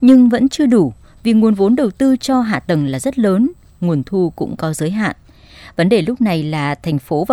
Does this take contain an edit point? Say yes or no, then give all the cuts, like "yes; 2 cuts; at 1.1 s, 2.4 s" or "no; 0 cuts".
no; 0 cuts